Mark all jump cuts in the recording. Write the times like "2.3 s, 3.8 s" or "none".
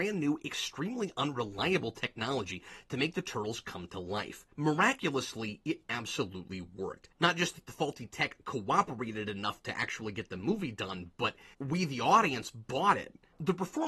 4.5 s, 7.1 s, 11.5 s